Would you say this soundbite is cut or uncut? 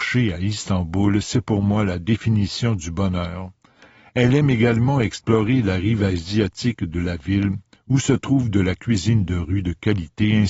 uncut